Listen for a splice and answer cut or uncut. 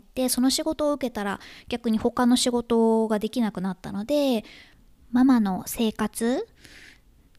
uncut